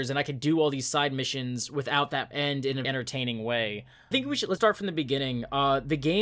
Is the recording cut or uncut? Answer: cut